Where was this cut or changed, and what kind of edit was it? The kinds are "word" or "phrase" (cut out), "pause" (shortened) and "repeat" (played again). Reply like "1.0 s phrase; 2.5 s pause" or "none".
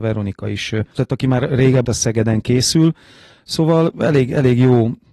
1.0 s word; 1.8 s word; 3.9 s word